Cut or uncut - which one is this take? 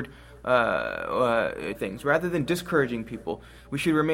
cut